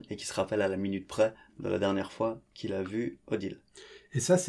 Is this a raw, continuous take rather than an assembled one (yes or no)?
yes